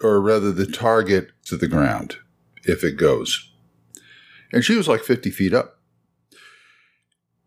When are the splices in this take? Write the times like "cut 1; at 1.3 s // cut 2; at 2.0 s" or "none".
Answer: cut 1; at 1.5 s